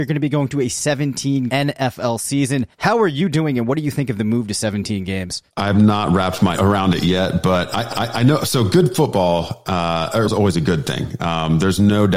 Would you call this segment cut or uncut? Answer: cut